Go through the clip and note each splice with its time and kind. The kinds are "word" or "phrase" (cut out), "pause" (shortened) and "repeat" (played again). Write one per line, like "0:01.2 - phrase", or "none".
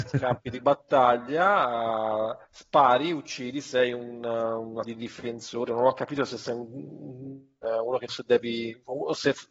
0:02.4 - pause
0:04.8 - word
0:08.1 - phrase

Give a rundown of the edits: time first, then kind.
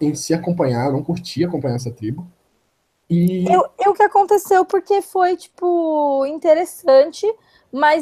0:03.9 - phrase

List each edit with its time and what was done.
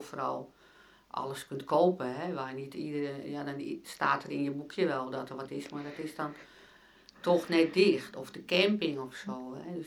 none

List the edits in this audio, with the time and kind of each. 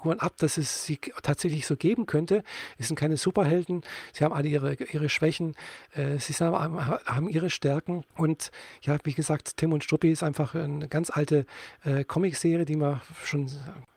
0:08.1 - pause

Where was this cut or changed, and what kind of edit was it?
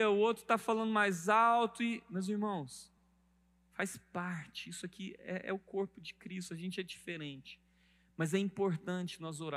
none

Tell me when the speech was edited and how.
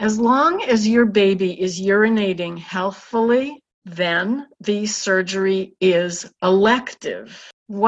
none

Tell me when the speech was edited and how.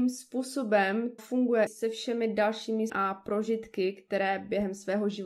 0:01.2 - word
0:01.7 - word
0:02.9 - word

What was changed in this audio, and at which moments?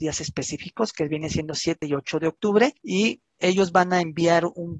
none

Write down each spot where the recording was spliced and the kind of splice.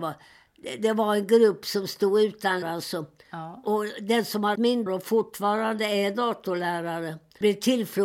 0:02.6 - word
0:04.5 - word
0:04.9 - word

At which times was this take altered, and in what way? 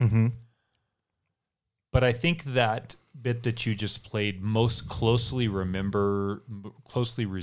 none

